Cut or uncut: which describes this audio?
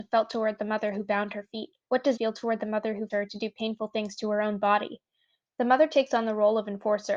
cut